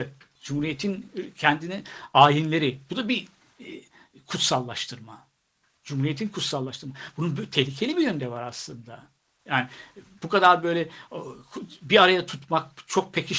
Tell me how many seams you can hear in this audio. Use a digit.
0